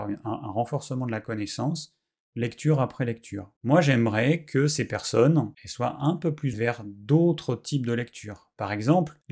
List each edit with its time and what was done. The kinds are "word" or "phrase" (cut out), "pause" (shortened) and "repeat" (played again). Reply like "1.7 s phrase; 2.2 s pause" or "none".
5.5 s pause; 6.5 s phrase